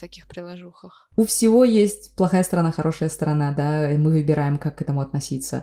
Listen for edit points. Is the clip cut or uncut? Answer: uncut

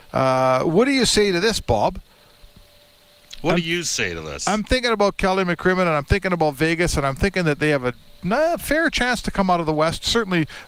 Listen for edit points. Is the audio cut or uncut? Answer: uncut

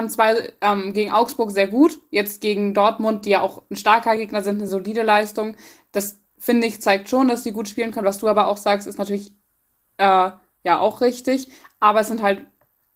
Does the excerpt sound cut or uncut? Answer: uncut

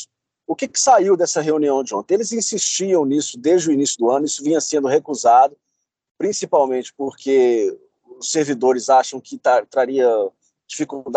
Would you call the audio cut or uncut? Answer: uncut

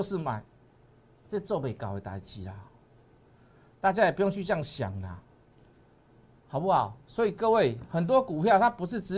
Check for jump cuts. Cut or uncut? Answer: uncut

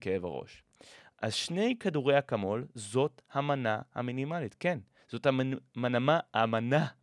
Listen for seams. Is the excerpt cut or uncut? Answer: uncut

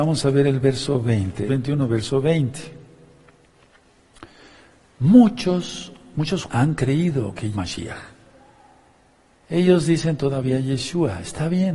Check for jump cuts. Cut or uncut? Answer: cut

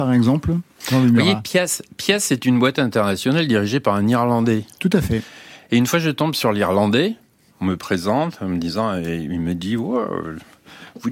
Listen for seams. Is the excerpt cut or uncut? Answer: uncut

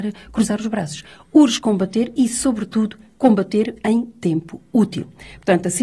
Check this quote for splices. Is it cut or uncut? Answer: uncut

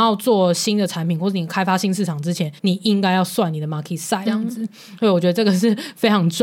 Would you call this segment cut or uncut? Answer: cut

